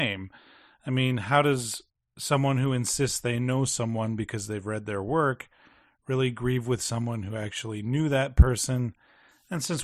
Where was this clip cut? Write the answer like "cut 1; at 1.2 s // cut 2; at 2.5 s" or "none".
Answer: none